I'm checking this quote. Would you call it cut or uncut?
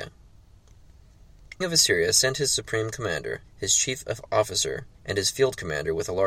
cut